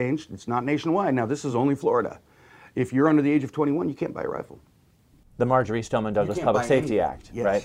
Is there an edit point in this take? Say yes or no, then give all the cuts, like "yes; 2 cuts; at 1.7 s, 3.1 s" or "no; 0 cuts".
no; 0 cuts